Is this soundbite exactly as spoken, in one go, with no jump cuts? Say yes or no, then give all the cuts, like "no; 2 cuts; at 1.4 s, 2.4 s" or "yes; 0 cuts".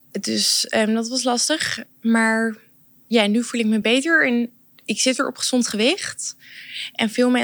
yes; 0 cuts